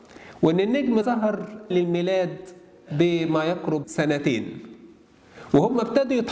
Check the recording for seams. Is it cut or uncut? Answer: cut